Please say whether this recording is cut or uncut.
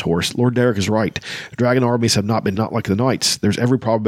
cut